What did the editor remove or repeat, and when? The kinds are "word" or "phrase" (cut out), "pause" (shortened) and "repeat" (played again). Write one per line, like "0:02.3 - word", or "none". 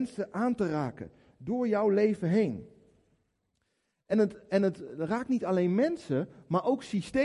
none